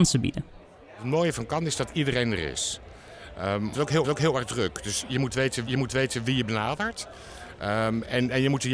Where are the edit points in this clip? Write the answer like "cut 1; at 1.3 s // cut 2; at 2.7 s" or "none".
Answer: cut 1; at 3.7 s // cut 2; at 4.0 s // cut 3; at 5.7 s